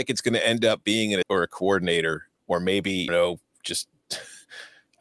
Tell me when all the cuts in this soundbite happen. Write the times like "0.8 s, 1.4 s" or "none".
1.2 s, 2.4 s, 3.1 s